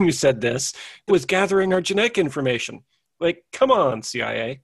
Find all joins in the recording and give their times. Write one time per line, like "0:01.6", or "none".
0:01.1